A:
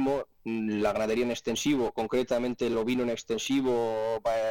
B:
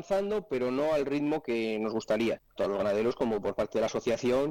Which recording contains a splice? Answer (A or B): B